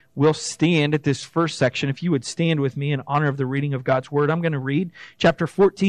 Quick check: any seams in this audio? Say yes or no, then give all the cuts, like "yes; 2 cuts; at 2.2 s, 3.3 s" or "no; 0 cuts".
no; 0 cuts